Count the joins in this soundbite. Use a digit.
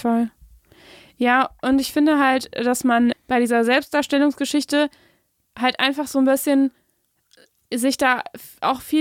1